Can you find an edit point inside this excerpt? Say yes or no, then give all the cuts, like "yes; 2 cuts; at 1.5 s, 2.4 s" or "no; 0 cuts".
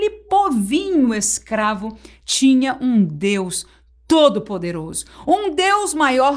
no; 0 cuts